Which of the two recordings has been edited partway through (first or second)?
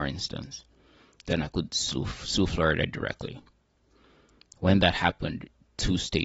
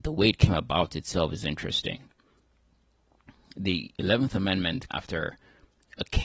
second